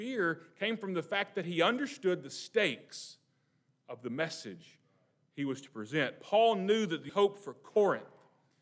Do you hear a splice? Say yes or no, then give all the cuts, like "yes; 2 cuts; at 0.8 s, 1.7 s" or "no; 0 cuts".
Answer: yes; 1 cut; at 7.1 s